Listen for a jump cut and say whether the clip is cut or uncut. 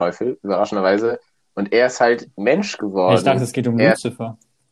uncut